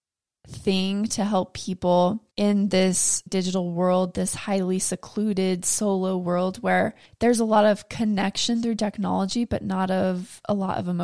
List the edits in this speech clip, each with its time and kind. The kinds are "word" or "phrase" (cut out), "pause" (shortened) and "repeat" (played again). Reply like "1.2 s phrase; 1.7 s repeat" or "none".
2.3 s pause; 3.3 s word; 7.1 s pause